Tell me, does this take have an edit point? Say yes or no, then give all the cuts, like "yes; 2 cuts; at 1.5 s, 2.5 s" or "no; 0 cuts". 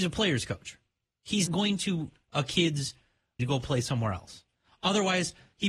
yes; 3 cuts; at 1.5 s, 2.2 s, 3.4 s